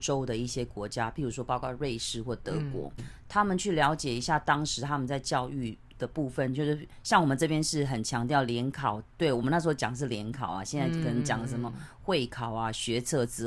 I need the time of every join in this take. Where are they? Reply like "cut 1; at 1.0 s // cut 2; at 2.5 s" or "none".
cut 1; at 3.0 s